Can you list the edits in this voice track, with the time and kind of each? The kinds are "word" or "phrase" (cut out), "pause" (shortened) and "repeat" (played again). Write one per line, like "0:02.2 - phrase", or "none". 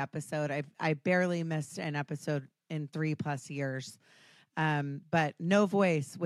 none